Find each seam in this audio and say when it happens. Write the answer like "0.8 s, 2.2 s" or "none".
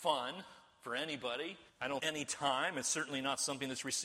1.7 s, 2.0 s